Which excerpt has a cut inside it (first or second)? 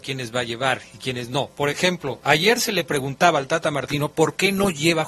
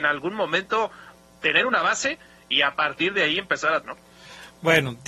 second